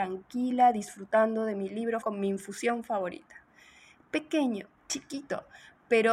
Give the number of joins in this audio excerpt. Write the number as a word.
two